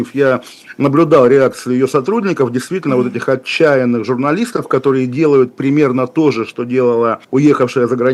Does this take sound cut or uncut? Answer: cut